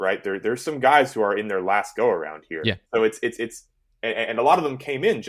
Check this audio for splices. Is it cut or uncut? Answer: cut